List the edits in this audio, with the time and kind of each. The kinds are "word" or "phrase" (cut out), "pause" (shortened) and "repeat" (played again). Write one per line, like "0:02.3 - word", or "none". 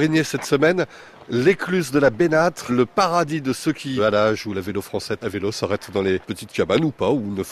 0:02.7 - word
0:04.0 - phrase
0:05.2 - word
0:06.2 - word